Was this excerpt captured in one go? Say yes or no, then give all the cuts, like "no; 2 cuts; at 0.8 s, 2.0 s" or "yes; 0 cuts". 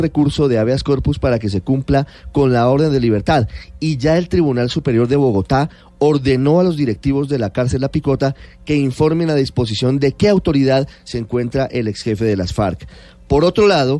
yes; 0 cuts